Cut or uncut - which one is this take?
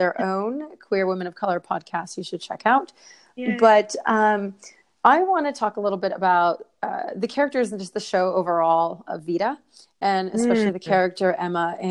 uncut